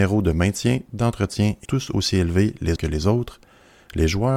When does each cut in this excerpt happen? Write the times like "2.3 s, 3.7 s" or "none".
1.6 s, 2.8 s